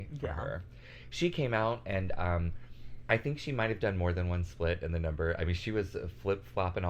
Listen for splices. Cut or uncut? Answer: uncut